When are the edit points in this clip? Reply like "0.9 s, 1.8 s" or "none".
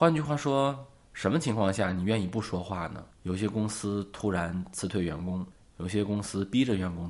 none